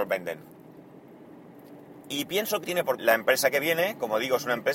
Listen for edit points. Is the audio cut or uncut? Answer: cut